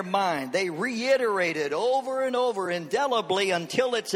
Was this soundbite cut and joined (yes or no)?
no